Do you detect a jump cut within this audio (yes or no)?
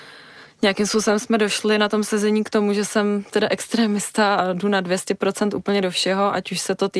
no